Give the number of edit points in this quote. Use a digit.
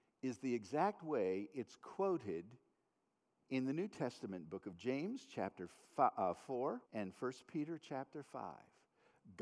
1